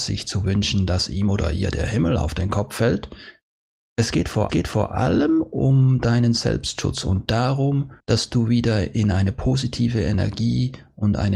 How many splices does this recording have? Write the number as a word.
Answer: two